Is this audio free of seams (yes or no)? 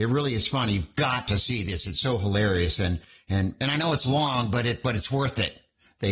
yes